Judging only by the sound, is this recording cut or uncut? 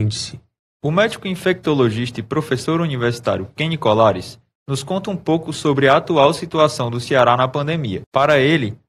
uncut